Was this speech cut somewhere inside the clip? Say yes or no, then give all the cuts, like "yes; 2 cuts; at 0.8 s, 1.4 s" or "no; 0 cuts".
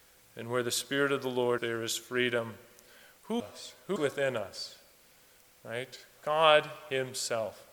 yes; 3 cuts; at 1.6 s, 3.4 s, 4.0 s